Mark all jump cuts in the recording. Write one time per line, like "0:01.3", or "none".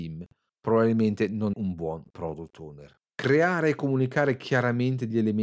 0:01.5
0:03.1